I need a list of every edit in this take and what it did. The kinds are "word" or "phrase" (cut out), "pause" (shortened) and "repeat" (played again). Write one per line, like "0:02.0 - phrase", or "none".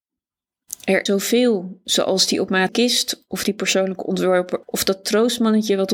0:01.1 - word
0:02.7 - word
0:04.6 - word